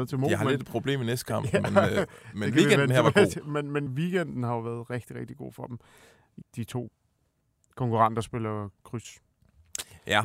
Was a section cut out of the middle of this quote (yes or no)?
yes